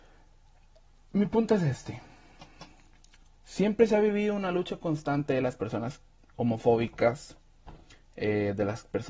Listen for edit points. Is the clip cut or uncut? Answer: uncut